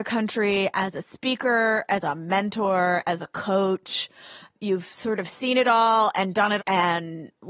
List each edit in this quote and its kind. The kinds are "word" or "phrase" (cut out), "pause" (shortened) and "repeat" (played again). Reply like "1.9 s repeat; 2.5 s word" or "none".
6.6 s word